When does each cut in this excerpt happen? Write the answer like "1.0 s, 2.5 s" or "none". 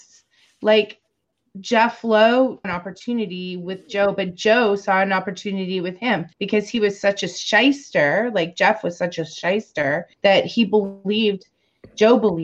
2.6 s, 6.3 s, 10.1 s